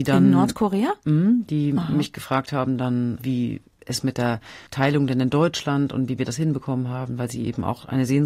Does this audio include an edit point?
yes; 1 cut; at 4.7 s

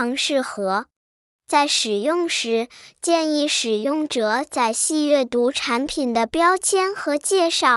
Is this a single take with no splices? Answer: yes; 0 cuts

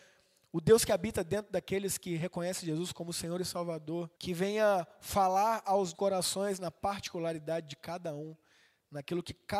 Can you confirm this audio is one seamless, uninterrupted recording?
no; 2 cuts; at 4.1 s, 5.9 s

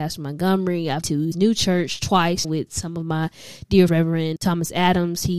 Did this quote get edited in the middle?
yes; 5 cuts; at 1.0 s, 1.3 s, 2.4 s, 3.9 s, 4.4 s

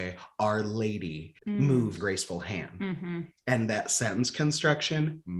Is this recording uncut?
no; 2 cuts; at 1.4 s, 2.0 s

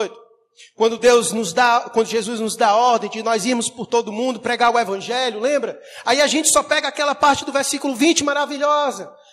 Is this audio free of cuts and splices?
yes; 0 cuts

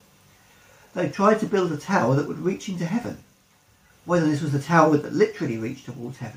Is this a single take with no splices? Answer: yes; 0 cuts

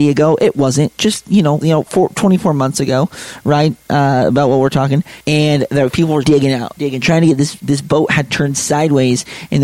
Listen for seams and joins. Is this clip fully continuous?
no; 4 cuts; at 1.6 s, 5.2 s, 6.2 s, 6.8 s

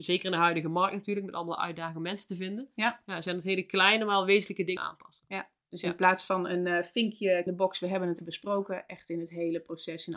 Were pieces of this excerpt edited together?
yes; 3 cuts; at 4.8 s, 7.5 s, 8.2 s

